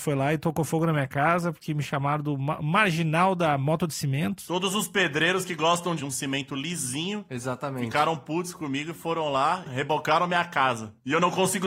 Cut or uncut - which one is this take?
cut